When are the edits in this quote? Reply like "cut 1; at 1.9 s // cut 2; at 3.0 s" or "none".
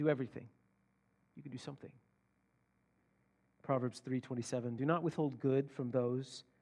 none